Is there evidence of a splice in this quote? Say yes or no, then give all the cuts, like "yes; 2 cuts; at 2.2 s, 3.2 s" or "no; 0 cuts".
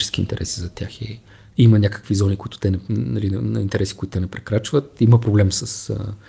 no; 0 cuts